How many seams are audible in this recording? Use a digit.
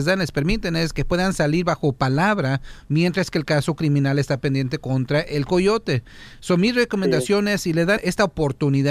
1